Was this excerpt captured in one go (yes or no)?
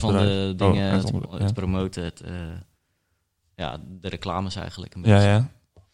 yes